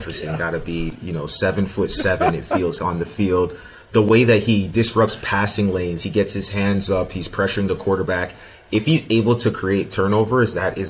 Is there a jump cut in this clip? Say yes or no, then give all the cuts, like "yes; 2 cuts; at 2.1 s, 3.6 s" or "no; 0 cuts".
yes; 1 cut; at 2.8 s